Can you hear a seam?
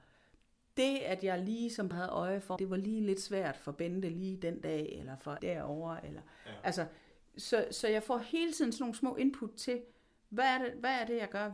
yes; 3 cuts; at 1.9 s, 2.6 s, 5.4 s

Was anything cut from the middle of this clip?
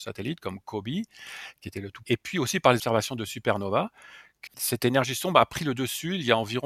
yes; 2 cuts; at 2.0 s, 4.5 s

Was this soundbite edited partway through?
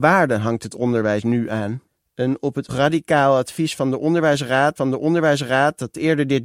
yes; 3 cuts; at 1.9 s, 2.7 s, 4.8 s

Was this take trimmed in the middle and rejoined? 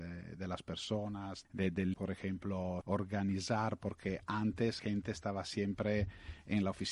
yes; 5 cuts; at 1.4 s, 1.9 s, 2.8 s, 3.8 s, 4.8 s

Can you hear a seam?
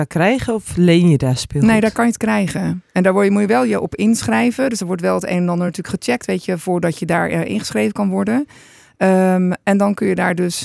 no; 0 cuts

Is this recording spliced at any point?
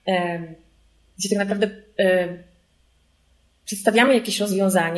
no; 0 cuts

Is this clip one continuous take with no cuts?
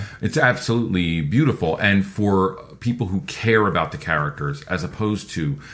yes; 0 cuts

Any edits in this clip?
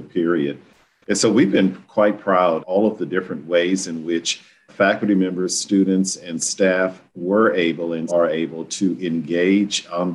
yes; 4 cuts; at 2.6 s, 4.7 s, 7.1 s, 8.1 s

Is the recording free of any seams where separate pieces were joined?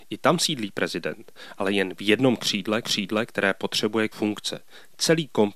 no; 2 cuts; at 2.8 s, 4.1 s

